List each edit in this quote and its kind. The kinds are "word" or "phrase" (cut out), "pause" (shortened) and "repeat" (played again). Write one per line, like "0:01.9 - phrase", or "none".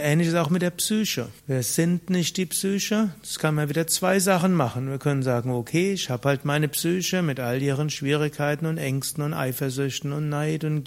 0:01.4 - pause